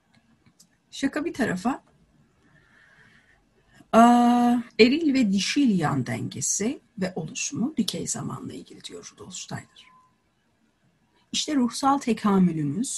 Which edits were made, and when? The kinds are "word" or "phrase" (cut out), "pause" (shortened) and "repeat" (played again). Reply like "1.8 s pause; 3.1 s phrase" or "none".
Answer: 4.7 s pause; 6.9 s pause